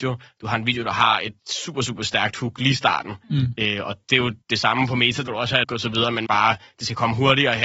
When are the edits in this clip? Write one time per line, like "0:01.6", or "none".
0:01.4
0:03.2
0:04.4
0:05.3
0:05.6
0:06.3